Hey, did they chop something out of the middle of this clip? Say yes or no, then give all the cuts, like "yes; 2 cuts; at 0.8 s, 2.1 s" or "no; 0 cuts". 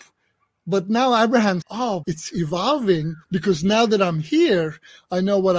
yes; 3 cuts; at 1.6 s, 2.0 s, 3.2 s